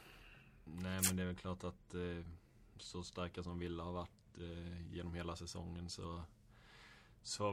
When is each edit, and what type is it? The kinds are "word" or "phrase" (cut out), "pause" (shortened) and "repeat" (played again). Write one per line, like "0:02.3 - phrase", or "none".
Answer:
none